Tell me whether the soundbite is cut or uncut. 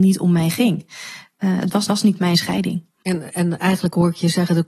cut